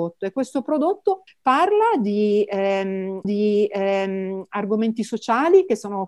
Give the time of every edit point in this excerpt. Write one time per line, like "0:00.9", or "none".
0:01.3
0:03.2